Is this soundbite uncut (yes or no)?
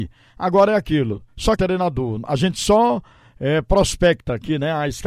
no